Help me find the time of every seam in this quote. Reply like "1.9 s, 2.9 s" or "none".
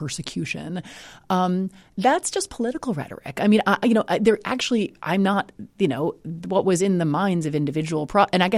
none